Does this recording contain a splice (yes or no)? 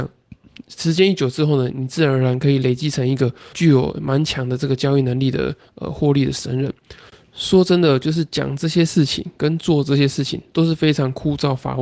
yes